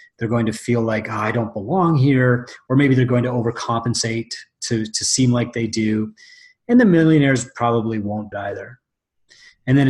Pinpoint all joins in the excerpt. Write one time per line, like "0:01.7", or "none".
0:08.3